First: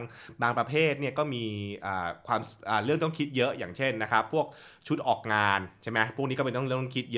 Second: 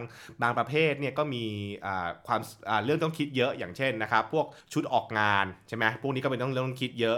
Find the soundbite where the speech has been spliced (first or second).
second